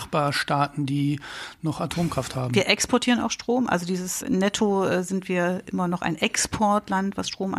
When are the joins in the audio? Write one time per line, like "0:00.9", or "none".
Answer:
0:04.2

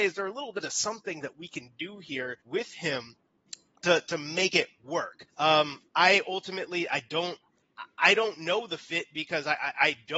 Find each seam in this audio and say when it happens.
0:02.4
0:05.3

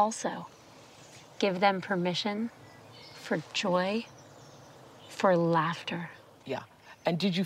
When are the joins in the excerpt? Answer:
none

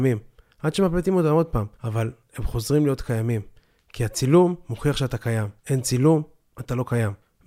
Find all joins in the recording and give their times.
0:01.7
0:05.6

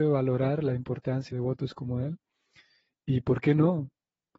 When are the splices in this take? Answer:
0:01.3

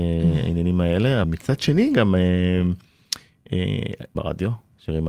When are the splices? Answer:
0:01.2
0:04.1

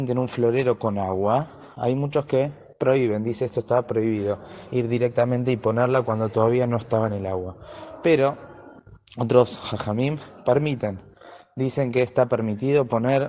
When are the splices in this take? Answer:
none

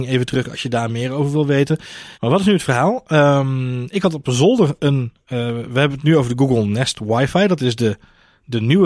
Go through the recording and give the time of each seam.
0:02.1

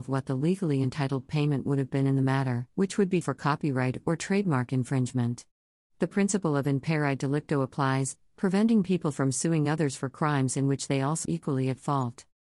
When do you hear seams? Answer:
0:02.7
0:03.2
0:11.3

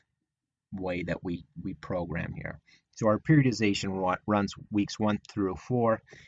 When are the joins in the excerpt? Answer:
none

